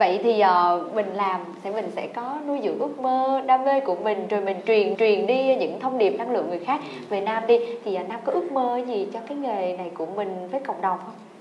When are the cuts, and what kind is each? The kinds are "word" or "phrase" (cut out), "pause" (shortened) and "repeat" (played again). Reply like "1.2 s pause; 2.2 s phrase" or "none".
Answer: 4.9 s repeat